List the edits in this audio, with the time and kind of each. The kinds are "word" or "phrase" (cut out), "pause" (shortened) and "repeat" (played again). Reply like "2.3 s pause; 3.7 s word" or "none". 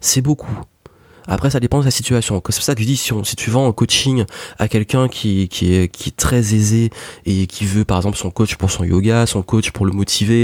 none